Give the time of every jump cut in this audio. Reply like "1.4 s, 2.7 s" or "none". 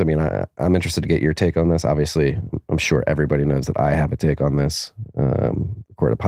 none